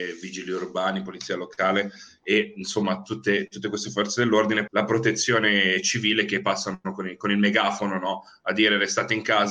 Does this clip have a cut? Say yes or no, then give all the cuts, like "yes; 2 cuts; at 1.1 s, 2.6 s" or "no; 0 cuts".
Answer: yes; 1 cut; at 4.7 s